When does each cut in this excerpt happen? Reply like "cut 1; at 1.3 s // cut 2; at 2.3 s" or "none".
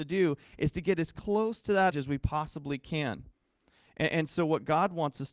cut 1; at 1.9 s